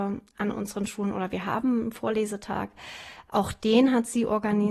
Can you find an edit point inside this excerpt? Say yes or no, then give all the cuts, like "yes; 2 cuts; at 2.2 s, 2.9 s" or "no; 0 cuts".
no; 0 cuts